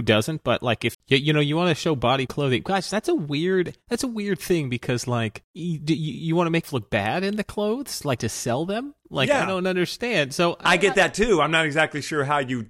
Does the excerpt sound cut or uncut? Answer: cut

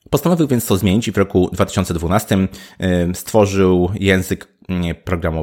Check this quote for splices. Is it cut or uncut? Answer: uncut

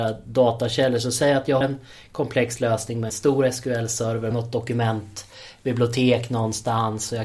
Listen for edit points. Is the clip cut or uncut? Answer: cut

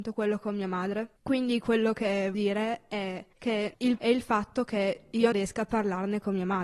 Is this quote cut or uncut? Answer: cut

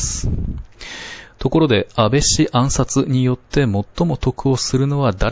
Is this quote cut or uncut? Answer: cut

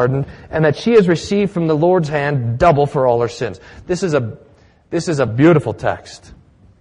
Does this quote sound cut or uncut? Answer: uncut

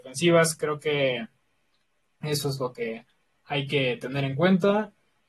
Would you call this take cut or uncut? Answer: uncut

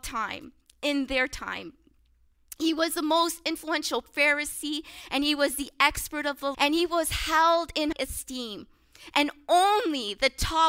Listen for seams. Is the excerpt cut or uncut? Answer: cut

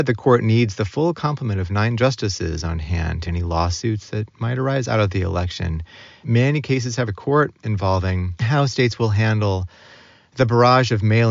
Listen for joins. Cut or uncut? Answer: cut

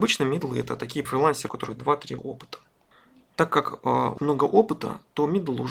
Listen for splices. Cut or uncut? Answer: cut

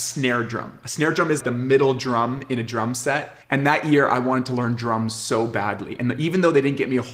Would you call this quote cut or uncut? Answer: cut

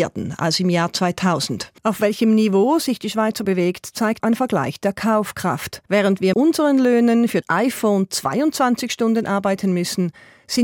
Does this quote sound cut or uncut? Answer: cut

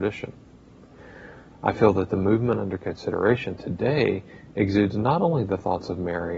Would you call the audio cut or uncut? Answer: uncut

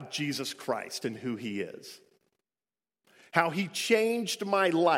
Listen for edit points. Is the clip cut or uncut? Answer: uncut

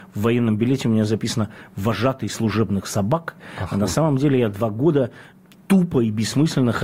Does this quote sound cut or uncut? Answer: uncut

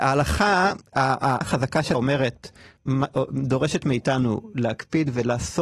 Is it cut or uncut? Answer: cut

